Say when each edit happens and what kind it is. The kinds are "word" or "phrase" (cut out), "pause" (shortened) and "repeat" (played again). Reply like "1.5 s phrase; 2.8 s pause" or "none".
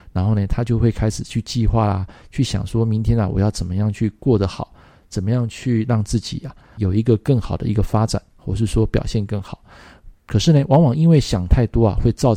6.8 s word